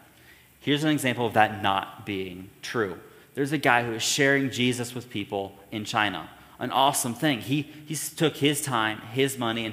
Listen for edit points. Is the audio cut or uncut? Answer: uncut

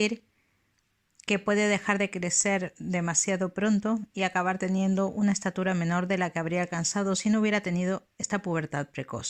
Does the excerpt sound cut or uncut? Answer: uncut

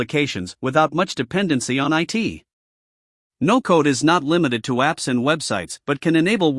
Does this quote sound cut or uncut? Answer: uncut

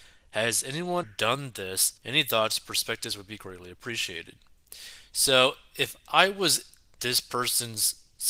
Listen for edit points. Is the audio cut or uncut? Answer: cut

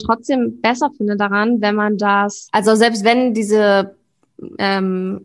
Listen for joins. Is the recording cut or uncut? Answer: uncut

